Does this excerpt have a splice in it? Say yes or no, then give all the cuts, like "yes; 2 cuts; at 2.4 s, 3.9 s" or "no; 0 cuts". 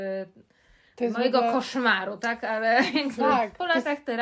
no; 0 cuts